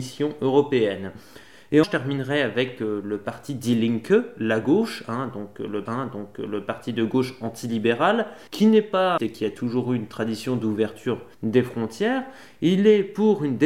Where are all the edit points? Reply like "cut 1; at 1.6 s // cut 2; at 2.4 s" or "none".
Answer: cut 1; at 1.8 s // cut 2; at 5.9 s // cut 3; at 8.5 s // cut 4; at 9.2 s // cut 5; at 11.3 s